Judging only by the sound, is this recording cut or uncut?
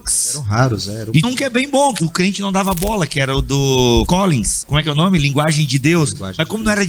cut